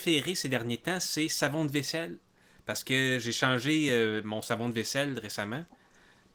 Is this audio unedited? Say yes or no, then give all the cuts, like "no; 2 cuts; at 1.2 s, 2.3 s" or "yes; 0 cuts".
yes; 0 cuts